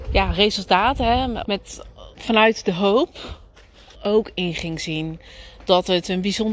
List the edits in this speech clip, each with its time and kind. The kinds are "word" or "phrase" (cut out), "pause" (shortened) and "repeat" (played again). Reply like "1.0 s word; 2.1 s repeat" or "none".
1.4 s word; 2.1 s pause; 3.9 s phrase